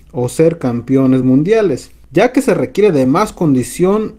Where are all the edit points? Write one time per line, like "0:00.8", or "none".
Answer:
none